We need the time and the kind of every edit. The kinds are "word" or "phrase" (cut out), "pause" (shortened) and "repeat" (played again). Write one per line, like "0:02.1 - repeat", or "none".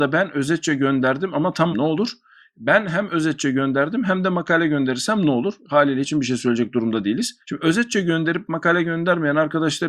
0:01.7 - phrase
0:06.0 - phrase
0:07.4 - pause